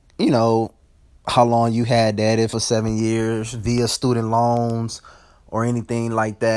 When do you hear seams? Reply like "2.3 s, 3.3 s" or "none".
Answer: 2.5 s